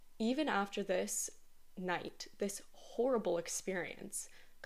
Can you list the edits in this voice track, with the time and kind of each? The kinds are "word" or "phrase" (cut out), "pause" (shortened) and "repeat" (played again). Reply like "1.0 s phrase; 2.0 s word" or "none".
none